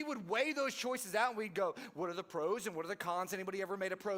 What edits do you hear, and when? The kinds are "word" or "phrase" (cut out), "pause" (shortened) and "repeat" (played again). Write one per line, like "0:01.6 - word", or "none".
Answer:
none